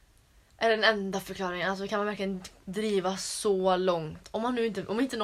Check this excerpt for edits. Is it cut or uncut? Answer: uncut